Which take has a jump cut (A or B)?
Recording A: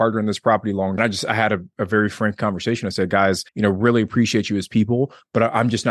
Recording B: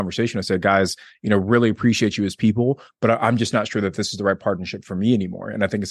A